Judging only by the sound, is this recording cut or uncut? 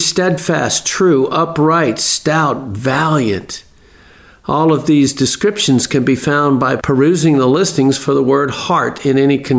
uncut